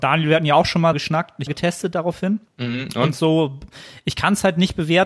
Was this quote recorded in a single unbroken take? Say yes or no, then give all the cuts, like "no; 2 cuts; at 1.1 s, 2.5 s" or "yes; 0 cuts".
no; 3 cuts; at 0.9 s, 1.5 s, 2.5 s